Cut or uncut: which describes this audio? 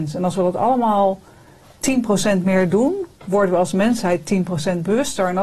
uncut